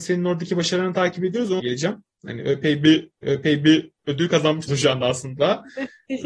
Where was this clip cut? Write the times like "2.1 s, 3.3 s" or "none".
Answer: 1.6 s, 3.2 s, 4.7 s